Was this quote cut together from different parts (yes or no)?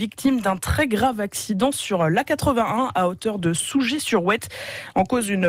no